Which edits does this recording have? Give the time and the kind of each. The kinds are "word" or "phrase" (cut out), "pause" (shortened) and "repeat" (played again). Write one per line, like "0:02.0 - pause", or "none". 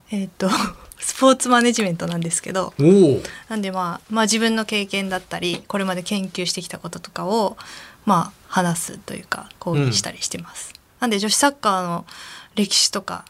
0:04.1 - pause
0:08.4 - pause